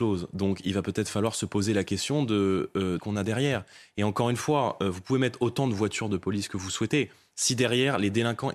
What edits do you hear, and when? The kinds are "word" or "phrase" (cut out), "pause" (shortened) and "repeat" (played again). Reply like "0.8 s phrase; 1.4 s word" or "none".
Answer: 3.0 s phrase